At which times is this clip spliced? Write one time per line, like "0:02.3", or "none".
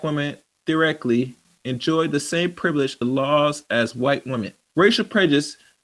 0:03.0
0:04.7